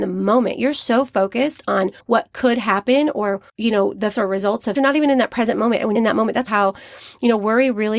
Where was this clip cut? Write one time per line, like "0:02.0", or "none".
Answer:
0:02.0
0:03.5
0:04.1
0:04.8
0:06.0
0:06.5